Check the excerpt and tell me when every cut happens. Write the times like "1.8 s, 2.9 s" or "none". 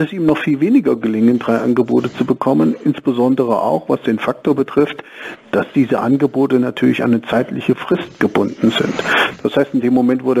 none

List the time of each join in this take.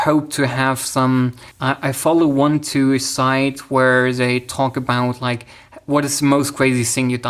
1.5 s

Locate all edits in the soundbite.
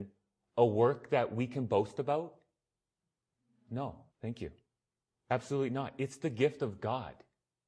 4.1 s

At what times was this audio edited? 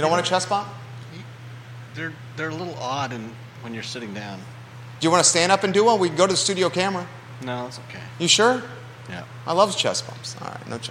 none

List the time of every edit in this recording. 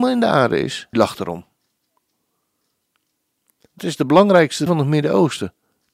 0.9 s, 3.8 s, 4.7 s

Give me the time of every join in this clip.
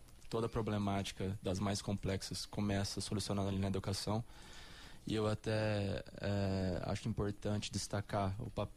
none

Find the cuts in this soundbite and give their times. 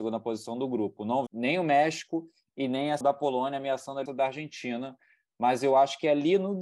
1.3 s, 3.0 s, 4.1 s

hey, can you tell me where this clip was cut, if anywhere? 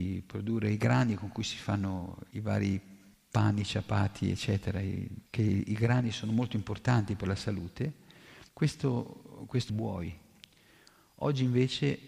2.3 s, 3.1 s, 5.3 s, 8.5 s, 9.7 s

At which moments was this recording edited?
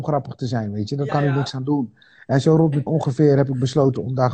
1.1 s, 2.9 s

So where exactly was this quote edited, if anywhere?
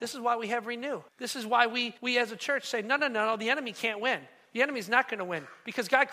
1.1 s, 2.0 s

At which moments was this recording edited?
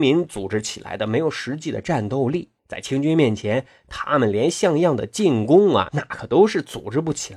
2.6 s

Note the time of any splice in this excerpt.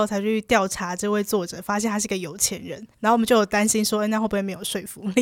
2.9 s

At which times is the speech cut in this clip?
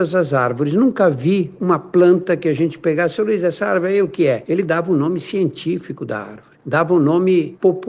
none

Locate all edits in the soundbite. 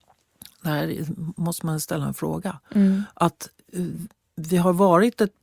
none

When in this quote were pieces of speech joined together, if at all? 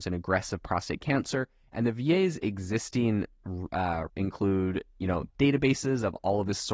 4.1 s, 5.3 s

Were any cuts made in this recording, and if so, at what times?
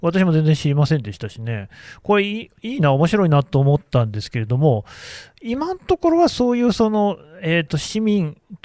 none

